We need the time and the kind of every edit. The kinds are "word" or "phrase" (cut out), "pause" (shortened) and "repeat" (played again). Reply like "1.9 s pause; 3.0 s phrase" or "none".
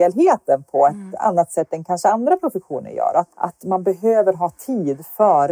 3.3 s pause